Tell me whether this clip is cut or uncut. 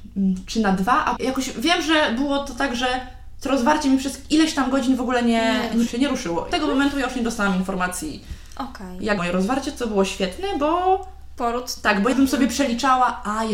cut